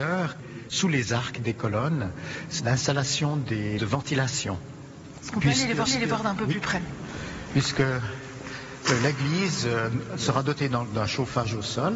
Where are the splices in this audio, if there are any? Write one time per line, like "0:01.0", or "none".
0:02.6
0:03.8
0:05.9